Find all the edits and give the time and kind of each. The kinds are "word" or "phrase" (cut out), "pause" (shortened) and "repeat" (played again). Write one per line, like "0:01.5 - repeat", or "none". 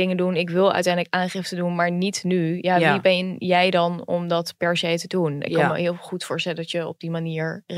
none